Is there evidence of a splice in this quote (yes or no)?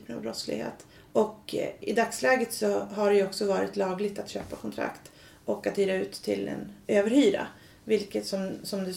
yes